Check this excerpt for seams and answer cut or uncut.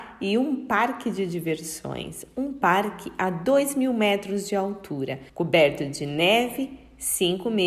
cut